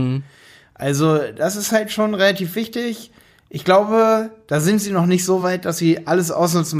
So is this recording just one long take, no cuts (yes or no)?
yes